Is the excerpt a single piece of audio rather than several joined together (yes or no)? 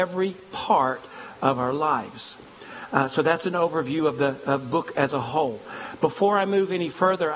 yes